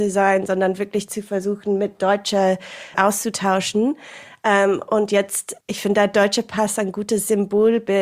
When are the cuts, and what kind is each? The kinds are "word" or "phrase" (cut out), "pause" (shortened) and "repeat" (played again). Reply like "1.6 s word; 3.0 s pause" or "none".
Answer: 2.9 s word; 5.6 s pause